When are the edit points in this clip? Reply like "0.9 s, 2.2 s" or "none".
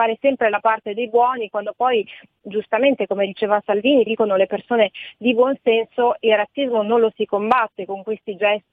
4.1 s